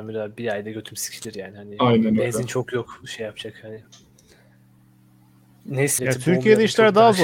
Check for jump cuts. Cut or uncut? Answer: cut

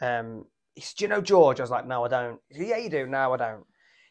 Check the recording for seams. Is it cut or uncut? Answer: uncut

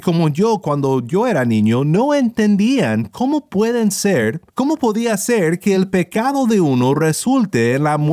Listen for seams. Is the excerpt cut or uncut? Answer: cut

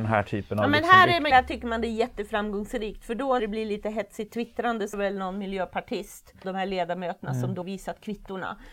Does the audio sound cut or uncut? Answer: cut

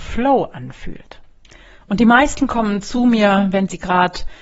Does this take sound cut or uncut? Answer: uncut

